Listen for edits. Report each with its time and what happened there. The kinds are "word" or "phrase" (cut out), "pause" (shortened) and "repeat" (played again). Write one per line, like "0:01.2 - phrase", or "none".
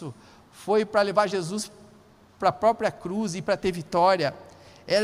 none